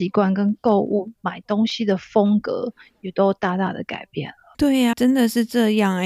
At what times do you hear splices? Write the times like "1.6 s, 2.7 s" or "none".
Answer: 4.9 s